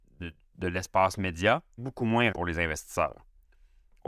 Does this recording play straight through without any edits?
no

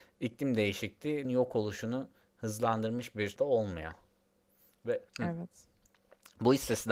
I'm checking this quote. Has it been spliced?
yes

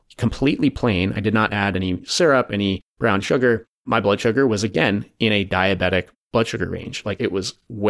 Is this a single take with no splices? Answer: yes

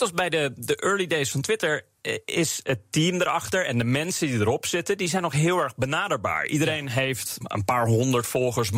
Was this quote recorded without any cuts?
no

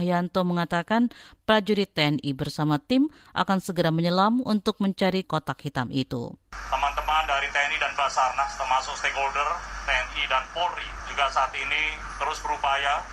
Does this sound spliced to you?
yes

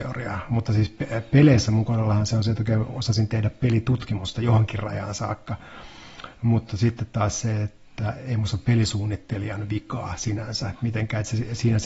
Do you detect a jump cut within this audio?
no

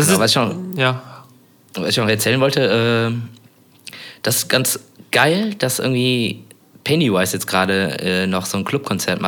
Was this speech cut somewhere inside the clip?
no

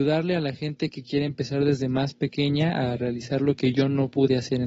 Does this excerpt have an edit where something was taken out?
no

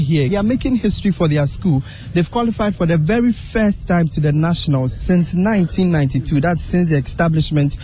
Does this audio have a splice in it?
no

